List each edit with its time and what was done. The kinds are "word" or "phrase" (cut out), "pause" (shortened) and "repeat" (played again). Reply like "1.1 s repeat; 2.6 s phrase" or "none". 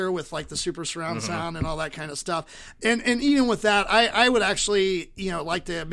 none